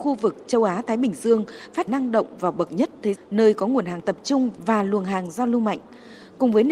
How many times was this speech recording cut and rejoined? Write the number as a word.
two